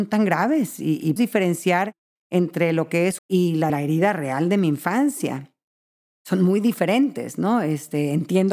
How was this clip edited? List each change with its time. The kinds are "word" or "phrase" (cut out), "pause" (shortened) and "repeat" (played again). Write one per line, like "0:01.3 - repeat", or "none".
0:01.2 - word
0:03.2 - phrase
0:03.7 - phrase